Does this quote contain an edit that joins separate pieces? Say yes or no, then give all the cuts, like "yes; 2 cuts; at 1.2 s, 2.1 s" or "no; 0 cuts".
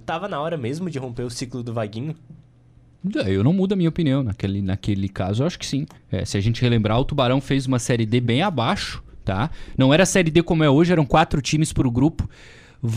yes; 1 cut; at 6.0 s